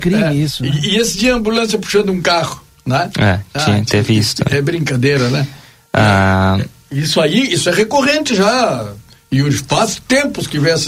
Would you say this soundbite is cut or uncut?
uncut